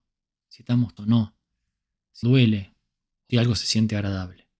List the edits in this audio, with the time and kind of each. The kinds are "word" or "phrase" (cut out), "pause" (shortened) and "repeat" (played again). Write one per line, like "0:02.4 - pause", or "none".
0:01.0 - word
0:02.2 - word
0:03.3 - word